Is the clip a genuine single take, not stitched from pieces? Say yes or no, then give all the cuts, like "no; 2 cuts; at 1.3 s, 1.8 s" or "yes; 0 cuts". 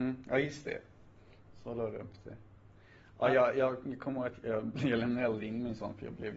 yes; 0 cuts